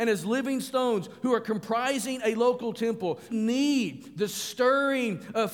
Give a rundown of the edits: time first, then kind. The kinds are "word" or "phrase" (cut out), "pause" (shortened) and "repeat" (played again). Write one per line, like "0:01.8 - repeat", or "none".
0:03.3 - word